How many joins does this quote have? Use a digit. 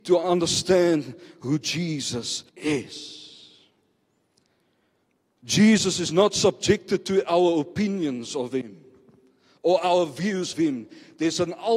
2